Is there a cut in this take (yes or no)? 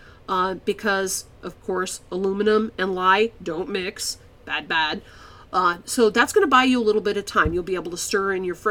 no